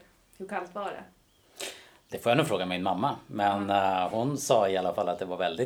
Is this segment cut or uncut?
uncut